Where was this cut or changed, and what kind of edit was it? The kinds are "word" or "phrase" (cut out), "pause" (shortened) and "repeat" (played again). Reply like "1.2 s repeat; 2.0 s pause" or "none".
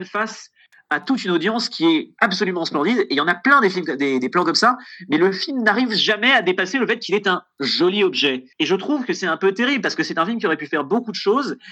8.5 s pause